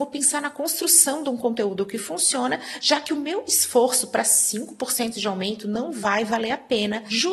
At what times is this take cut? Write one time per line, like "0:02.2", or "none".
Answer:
none